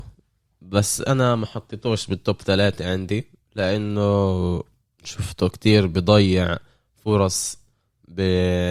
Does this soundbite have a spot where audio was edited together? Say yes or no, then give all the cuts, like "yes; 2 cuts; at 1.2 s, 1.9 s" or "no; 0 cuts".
no; 0 cuts